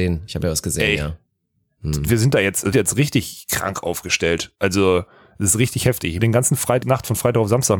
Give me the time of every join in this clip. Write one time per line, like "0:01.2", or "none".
0:02.7
0:06.2
0:06.8